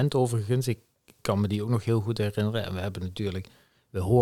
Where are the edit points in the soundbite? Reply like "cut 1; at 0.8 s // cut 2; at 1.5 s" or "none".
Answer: none

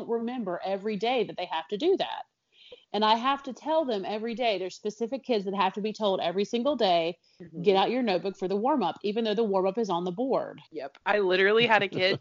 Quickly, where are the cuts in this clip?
cut 1; at 10.7 s

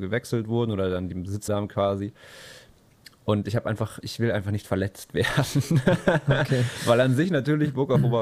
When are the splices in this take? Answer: cut 1; at 1.5 s // cut 2; at 4.0 s

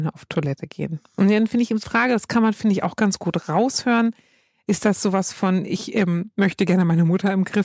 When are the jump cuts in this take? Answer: cut 1; at 1.8 s

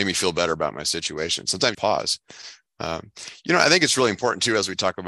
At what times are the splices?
cut 1; at 1.7 s

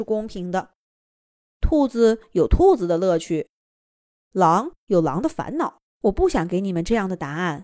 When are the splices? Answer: cut 1; at 5.9 s

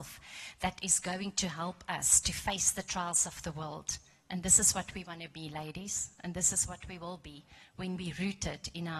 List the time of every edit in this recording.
none

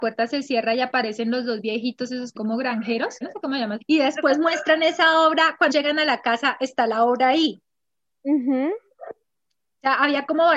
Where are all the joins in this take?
cut 1; at 2.4 s // cut 2; at 3.2 s // cut 3; at 3.8 s // cut 4; at 5.7 s

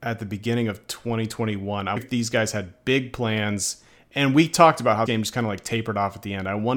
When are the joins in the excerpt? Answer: cut 1; at 2.0 s // cut 2; at 5.1 s

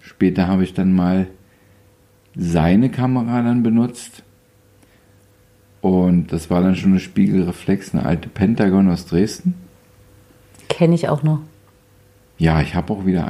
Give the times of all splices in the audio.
none

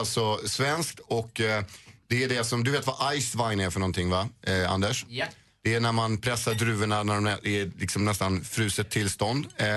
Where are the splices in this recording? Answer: none

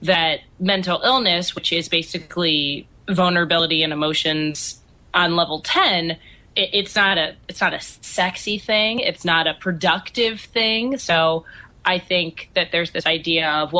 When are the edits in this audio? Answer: none

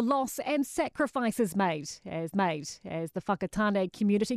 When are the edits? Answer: cut 1; at 2.3 s

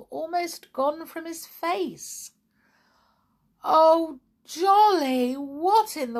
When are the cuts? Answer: none

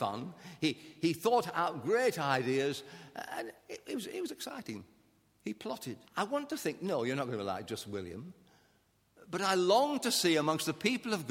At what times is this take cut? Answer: cut 1; at 3.6 s // cut 2; at 6.0 s

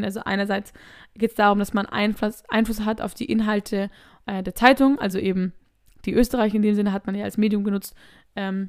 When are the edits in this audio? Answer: none

